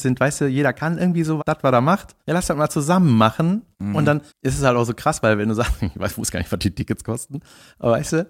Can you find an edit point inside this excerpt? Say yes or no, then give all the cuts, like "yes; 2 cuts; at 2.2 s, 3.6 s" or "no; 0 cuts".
yes; 4 cuts; at 1.4 s, 2.2 s, 3.7 s, 4.3 s